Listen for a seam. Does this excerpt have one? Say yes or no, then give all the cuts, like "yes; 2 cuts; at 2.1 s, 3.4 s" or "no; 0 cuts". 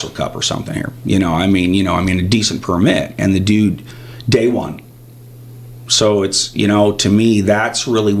no; 0 cuts